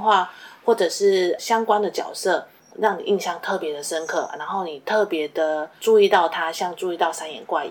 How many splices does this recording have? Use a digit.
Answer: 1